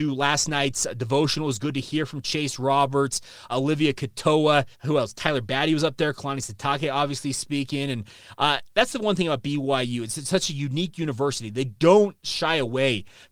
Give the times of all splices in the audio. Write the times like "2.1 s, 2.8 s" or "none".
3.5 s, 4.7 s